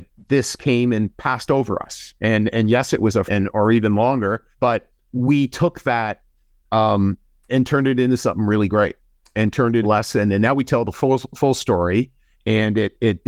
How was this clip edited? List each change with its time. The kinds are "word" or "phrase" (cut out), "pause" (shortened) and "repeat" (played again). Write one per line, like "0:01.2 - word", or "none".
0:02.2 - pause
0:03.3 - phrase
0:04.5 - pause
0:07.5 - word
0:09.8 - word